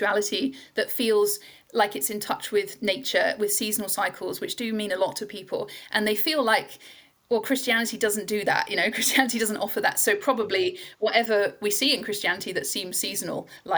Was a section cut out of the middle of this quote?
no; 0 cuts

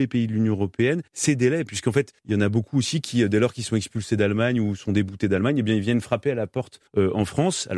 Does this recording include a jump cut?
yes; 3 cuts; at 1.1 s, 2.2 s, 6.9 s

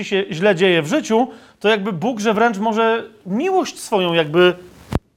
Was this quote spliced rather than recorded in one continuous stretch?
no; 0 cuts

